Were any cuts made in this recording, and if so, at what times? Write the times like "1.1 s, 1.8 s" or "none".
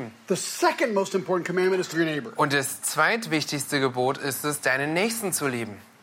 1.9 s

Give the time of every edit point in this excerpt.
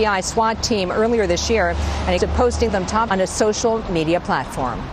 2.2 s, 2.7 s, 3.1 s

